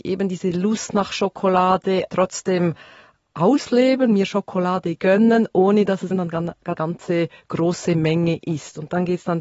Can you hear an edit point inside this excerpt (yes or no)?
yes